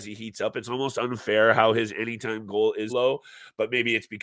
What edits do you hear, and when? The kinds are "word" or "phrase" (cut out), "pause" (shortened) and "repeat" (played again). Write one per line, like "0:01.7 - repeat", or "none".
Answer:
0:02.9 - word